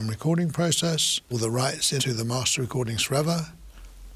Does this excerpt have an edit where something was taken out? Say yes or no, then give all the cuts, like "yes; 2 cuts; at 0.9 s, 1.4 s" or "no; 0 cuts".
yes; 2 cuts; at 1.3 s, 2.0 s